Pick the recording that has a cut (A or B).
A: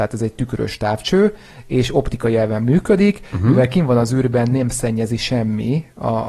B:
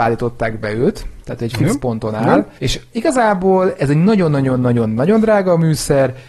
B